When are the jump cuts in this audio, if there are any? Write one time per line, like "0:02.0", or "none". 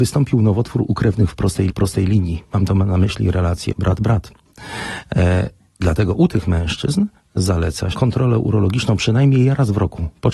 0:01.7
0:03.7
0:07.9